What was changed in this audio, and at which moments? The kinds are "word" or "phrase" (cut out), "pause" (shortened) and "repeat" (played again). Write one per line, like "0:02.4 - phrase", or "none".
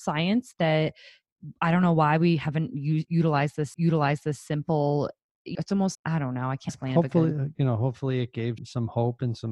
0:03.7 - repeat
0:05.5 - phrase
0:05.9 - word
0:06.7 - word
0:08.6 - word